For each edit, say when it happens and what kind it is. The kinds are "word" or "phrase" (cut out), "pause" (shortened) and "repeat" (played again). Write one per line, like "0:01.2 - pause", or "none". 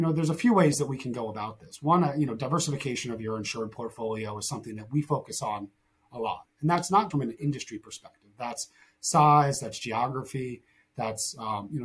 0:07.1 - word